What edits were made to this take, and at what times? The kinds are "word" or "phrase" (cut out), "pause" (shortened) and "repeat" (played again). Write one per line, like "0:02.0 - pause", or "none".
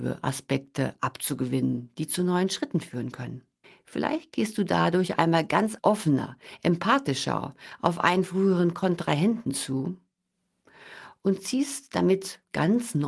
0:03.6 - pause
0:05.8 - word